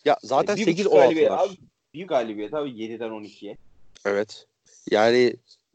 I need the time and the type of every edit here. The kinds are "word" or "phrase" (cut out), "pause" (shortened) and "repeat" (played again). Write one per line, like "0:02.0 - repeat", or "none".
0:02.1 - word
0:04.6 - pause